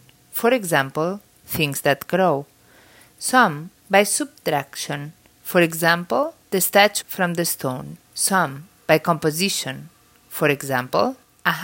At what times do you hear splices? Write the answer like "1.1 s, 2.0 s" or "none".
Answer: 3.8 s, 6.4 s, 7.0 s, 8.0 s